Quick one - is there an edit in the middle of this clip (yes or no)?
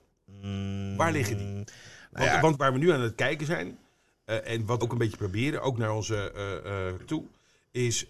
yes